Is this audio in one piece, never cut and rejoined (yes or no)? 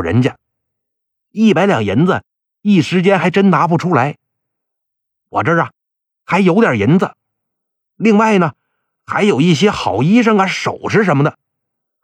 yes